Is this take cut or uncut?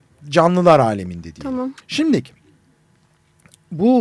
cut